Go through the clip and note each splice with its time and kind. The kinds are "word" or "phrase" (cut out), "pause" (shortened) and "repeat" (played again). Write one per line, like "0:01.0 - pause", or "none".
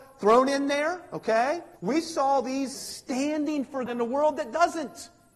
0:01.8 - pause
0:02.7 - word
0:03.9 - word